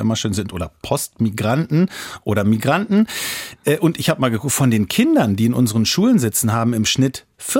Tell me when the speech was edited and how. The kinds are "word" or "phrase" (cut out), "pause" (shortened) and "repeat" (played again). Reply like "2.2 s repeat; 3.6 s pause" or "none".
none